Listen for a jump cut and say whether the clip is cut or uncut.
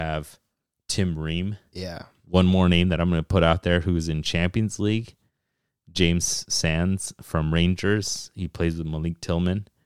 uncut